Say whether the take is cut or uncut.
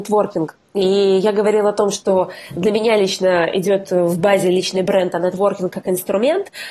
uncut